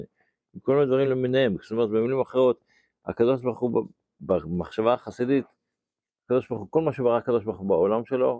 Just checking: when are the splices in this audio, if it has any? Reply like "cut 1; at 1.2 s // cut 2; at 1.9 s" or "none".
none